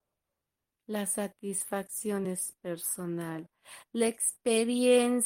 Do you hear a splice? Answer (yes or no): no